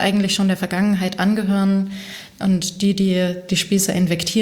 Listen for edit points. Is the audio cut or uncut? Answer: uncut